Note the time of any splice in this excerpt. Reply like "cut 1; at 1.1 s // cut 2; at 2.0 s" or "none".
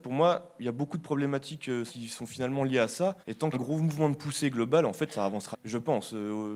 cut 1; at 1.9 s // cut 2; at 3.2 s // cut 3; at 3.5 s // cut 4; at 5.5 s